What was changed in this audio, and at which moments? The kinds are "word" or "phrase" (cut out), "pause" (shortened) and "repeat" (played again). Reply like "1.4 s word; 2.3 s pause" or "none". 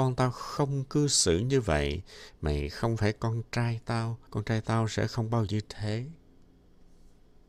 4.3 s pause; 5.5 s phrase